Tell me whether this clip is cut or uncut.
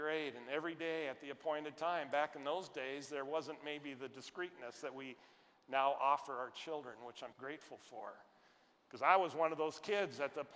cut